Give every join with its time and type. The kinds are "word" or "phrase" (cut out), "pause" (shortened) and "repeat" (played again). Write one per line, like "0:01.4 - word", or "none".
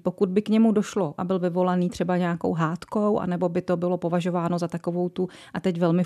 0:01.2 - word